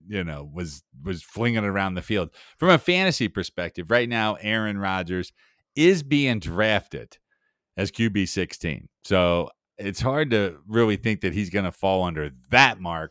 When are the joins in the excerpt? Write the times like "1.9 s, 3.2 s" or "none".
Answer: none